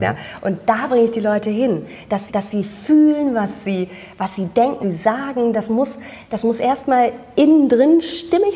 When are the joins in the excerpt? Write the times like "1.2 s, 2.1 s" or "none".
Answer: 2.3 s, 4.8 s